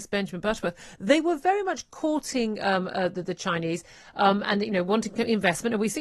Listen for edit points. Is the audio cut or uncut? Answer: uncut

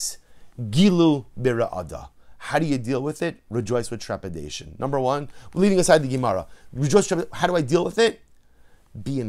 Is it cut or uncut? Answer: uncut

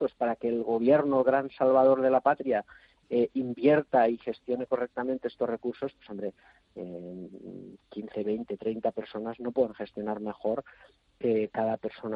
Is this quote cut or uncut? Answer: uncut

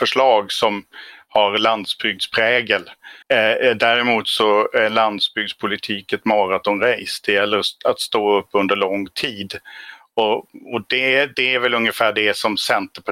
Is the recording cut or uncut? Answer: cut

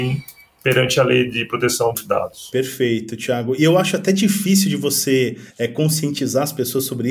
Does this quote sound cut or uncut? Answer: cut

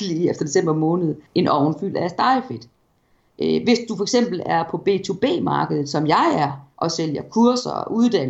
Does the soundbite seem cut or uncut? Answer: cut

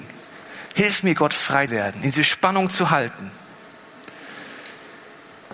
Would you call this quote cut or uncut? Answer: cut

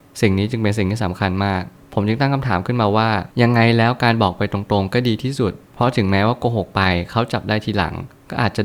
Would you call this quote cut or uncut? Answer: cut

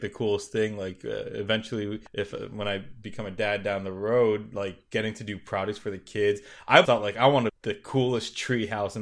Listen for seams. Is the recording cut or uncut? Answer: cut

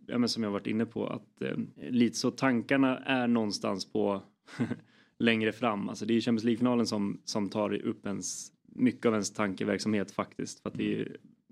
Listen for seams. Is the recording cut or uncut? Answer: cut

